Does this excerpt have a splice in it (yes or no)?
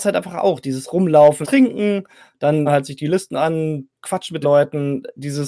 yes